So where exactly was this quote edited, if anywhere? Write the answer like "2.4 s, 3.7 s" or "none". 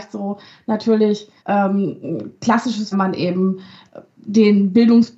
1.4 s, 2.9 s